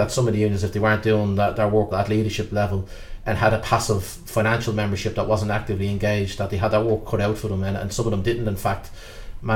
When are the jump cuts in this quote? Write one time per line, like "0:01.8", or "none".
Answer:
0:01.9